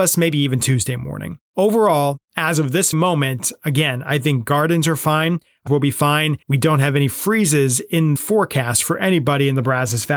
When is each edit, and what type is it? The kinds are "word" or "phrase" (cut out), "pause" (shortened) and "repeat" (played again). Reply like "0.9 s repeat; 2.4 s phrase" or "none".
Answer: 1.5 s pause; 2.9 s word; 5.7 s phrase; 6.4 s pause; 8.2 s word

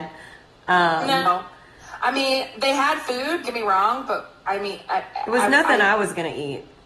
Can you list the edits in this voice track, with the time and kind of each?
3.4 s word

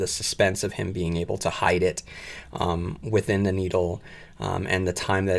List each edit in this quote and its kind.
none

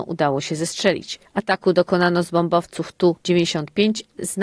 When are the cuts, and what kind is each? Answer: none

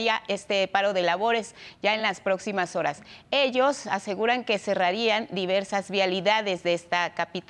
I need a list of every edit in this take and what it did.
none

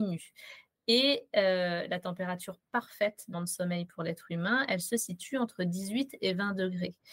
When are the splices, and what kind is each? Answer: 3.3 s word

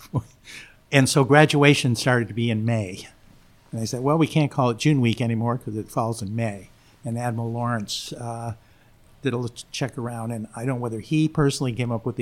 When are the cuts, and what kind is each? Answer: none

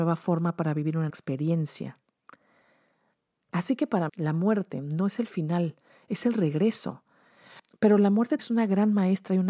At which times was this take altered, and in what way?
1.1 s word; 4.1 s word; 8.4 s word

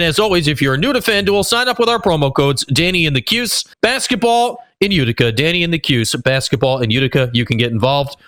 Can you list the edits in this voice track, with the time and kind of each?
3.7 s pause

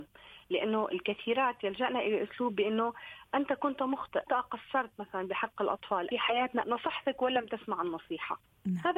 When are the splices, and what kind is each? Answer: 4.3 s word; 6.1 s phrase; 6.6 s word

